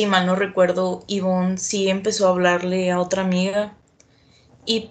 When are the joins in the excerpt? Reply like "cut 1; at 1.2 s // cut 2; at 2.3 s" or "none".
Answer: none